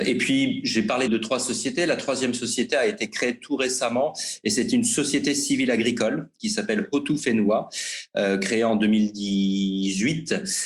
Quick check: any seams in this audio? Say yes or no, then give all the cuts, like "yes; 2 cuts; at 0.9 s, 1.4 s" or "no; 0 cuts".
yes; 1 cut; at 1.1 s